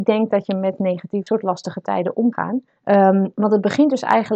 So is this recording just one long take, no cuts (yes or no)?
no